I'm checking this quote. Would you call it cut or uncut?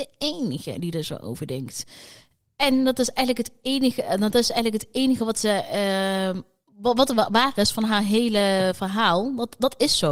uncut